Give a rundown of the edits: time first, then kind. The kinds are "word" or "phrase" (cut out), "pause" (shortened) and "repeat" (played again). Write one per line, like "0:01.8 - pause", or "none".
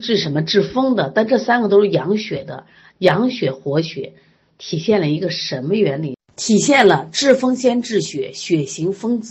none